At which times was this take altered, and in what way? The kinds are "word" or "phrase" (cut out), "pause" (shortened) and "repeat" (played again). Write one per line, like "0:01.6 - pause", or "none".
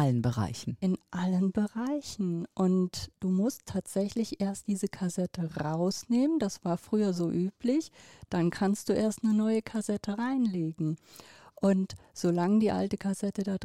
none